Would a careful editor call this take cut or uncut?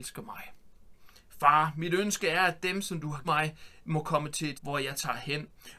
cut